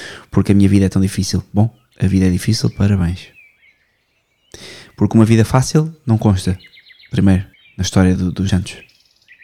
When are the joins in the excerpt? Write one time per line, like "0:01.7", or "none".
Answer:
0:07.5
0:08.2
0:08.5